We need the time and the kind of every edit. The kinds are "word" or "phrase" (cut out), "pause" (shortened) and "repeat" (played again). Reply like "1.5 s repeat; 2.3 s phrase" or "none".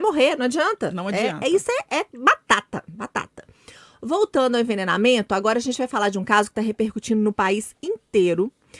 2.1 s pause

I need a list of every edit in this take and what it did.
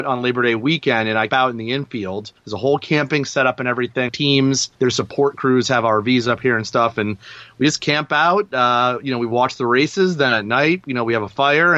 1.3 s word; 2.4 s pause; 4.1 s phrase; 4.7 s pause

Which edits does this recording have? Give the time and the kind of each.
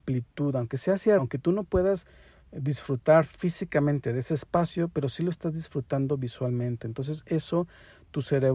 1.2 s word

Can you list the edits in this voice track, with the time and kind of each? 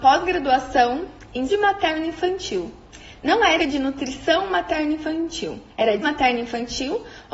1.5 s word; 3.6 s word; 5.7 s pause; 6.0 s word

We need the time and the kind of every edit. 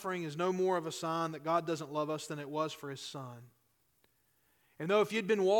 none

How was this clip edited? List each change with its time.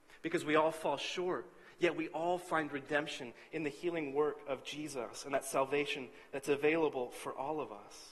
none

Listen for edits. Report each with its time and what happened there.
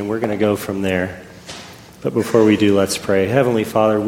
none

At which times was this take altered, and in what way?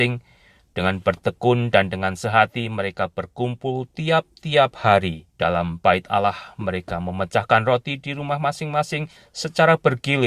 5.3 s pause; 9.2 s pause

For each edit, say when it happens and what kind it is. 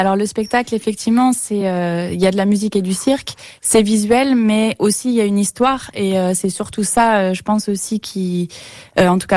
none

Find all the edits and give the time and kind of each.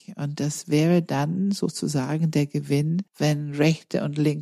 3.1 s pause

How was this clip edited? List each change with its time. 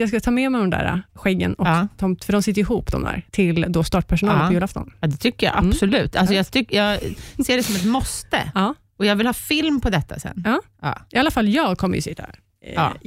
3.3 s pause

